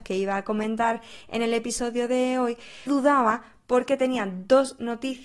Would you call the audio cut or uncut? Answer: cut